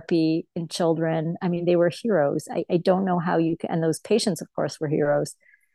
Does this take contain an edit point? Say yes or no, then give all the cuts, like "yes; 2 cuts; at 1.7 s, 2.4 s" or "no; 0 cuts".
no; 0 cuts